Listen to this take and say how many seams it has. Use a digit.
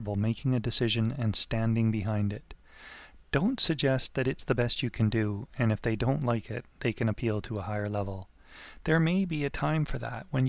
0